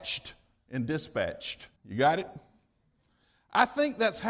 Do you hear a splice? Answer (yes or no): yes